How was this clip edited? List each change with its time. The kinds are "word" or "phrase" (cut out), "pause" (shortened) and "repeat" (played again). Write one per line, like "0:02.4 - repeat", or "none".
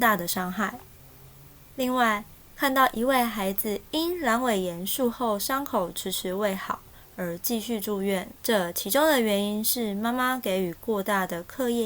0:08.4 - pause